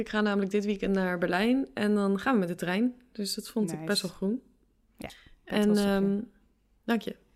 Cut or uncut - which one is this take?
uncut